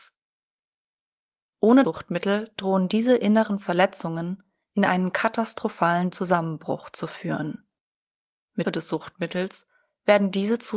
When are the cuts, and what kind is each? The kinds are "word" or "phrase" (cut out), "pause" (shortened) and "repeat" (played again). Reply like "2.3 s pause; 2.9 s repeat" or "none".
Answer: 1.8 s word; 6.1 s word; 8.6 s word